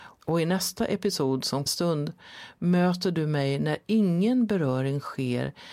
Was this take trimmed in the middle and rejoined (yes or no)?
yes